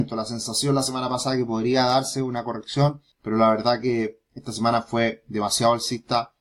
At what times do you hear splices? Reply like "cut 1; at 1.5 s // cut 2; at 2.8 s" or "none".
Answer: cut 1; at 3.1 s